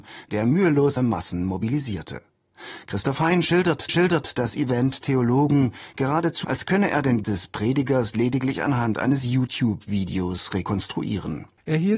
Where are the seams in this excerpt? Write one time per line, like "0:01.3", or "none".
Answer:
0:01.0
0:03.9
0:05.0
0:05.9
0:06.4
0:07.2